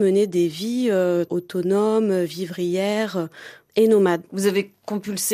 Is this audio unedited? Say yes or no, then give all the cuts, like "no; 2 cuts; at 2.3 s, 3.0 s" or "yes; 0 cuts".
no; 1 cut; at 1.3 s